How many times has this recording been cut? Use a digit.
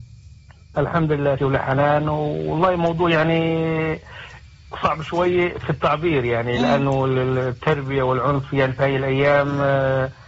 1